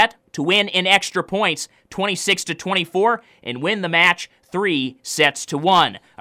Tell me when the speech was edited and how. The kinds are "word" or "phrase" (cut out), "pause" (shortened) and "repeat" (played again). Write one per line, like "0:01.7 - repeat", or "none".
none